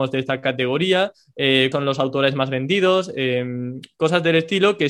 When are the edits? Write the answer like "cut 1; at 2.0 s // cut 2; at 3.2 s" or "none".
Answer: cut 1; at 1.7 s